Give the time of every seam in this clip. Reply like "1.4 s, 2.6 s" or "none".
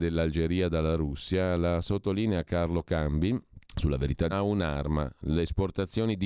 3.6 s, 4.3 s